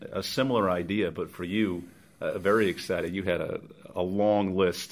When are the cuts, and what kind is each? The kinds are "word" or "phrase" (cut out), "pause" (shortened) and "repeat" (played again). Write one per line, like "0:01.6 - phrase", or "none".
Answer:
0:01.1 - word